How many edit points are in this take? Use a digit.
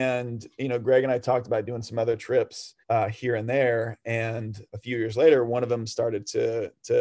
2